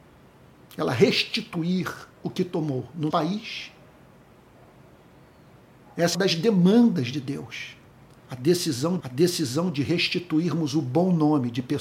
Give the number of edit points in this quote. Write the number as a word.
five